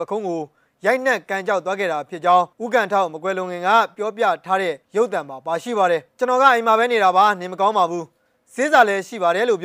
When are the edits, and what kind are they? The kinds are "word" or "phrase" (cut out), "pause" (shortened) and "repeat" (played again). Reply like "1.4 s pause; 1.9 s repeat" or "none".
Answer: 2.5 s pause; 4.8 s pause; 6.1 s pause